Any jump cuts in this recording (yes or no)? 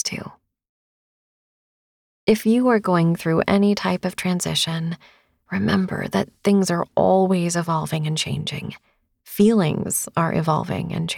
no